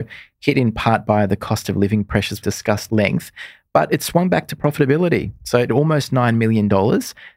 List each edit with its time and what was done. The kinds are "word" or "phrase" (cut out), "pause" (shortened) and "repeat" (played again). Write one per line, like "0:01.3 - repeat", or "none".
0:02.4 - word
0:02.9 - word
0:05.7 - word